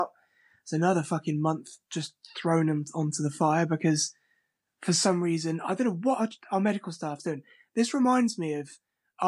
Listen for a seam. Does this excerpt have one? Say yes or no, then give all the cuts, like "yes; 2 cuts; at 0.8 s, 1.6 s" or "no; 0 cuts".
no; 0 cuts